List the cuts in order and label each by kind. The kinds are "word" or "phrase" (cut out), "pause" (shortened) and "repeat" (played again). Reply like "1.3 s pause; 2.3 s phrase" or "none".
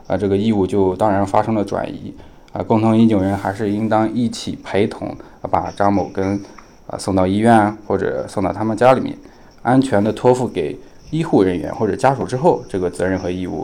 none